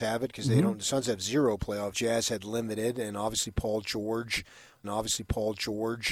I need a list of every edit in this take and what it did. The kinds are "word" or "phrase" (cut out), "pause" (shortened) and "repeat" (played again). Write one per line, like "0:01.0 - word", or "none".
0:01.9 - phrase
0:04.8 - repeat